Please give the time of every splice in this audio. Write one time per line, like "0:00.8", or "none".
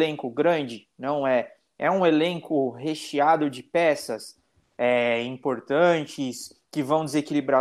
none